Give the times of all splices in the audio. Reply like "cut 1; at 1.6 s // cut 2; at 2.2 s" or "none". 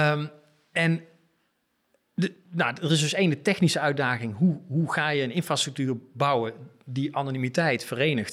none